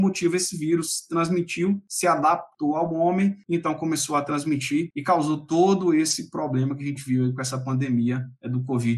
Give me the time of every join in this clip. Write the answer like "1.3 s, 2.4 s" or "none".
none